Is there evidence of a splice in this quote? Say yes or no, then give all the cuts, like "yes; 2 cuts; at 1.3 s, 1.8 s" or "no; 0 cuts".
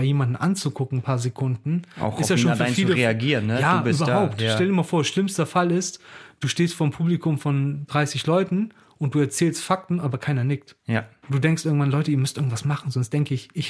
yes; 1 cut; at 10.8 s